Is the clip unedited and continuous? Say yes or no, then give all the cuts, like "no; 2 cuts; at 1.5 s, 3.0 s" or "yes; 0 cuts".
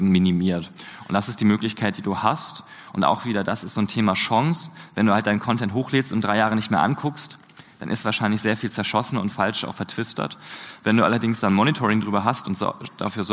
yes; 0 cuts